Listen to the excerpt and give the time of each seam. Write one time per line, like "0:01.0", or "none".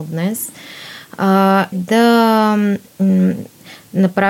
0:01.7